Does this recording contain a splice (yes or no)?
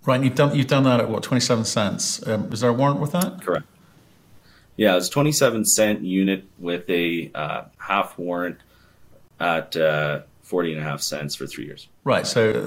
no